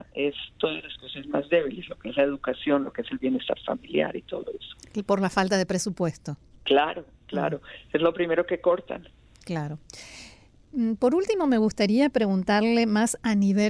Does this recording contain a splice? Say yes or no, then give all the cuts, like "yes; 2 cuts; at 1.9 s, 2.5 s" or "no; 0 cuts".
no; 0 cuts